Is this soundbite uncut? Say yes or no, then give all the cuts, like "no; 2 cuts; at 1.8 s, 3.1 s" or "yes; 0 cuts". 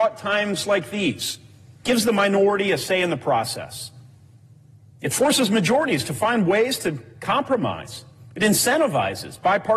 no; 1 cut; at 1.8 s